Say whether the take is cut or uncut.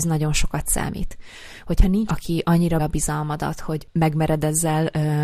cut